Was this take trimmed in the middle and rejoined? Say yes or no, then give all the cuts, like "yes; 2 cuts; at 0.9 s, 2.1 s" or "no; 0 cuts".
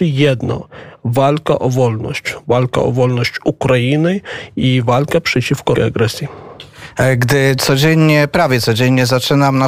yes; 1 cut; at 5.8 s